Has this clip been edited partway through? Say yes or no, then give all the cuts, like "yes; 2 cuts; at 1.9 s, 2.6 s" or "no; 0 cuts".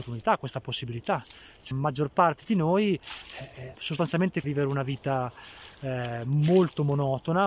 yes; 3 cuts; at 1.7 s, 3.7 s, 4.4 s